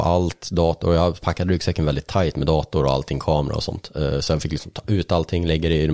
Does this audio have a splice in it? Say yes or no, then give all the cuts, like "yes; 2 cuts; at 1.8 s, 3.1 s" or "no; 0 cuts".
no; 0 cuts